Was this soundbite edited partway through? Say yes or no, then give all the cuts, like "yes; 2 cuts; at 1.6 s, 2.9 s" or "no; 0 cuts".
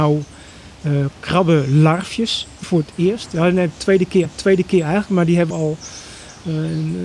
yes; 3 cuts; at 2.6 s, 4.3 s, 5.5 s